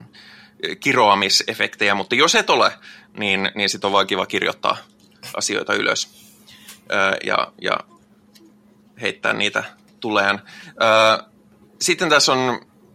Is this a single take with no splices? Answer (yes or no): yes